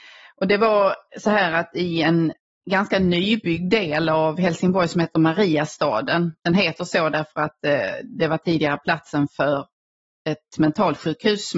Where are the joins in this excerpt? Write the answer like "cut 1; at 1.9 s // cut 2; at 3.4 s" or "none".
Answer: none